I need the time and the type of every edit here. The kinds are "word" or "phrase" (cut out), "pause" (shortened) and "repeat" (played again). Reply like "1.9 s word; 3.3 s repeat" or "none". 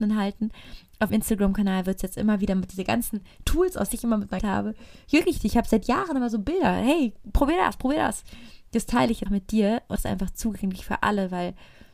1.1 s word; 3.9 s phrase; 4.4 s phrase; 9.3 s word; 10.0 s word